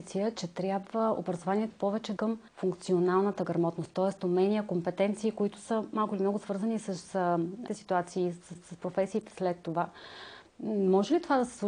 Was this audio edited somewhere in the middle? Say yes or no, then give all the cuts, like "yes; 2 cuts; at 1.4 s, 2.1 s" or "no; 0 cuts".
yes; 5 cuts; at 1.7 s, 2.2 s, 2.5 s, 7.7 s, 8.5 s